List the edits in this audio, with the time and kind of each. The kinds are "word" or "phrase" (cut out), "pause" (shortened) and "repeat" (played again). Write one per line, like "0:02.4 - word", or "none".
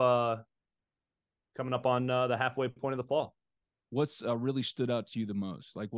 none